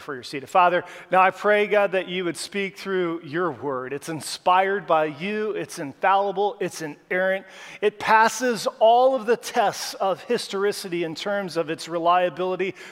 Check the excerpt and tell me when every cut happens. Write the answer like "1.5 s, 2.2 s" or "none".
none